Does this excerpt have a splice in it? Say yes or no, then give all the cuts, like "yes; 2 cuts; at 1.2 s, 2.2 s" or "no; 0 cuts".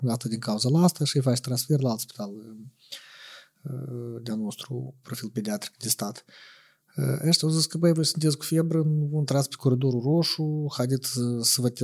no; 0 cuts